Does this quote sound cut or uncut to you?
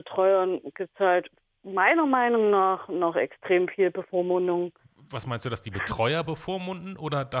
uncut